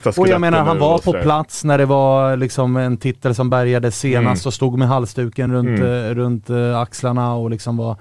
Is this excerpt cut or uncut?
uncut